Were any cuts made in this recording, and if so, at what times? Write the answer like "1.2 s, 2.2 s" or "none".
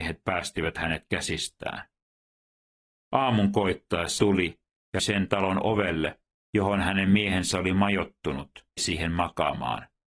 4.2 s, 5.0 s, 8.8 s